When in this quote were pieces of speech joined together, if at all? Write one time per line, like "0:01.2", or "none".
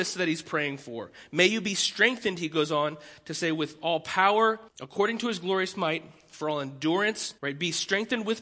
0:04.7
0:07.4